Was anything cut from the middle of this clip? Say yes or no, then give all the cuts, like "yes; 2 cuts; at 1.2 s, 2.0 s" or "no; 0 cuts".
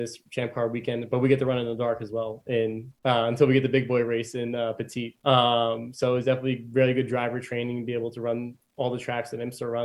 yes; 2 cuts; at 3.0 s, 5.2 s